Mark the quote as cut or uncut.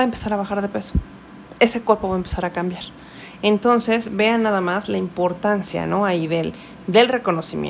uncut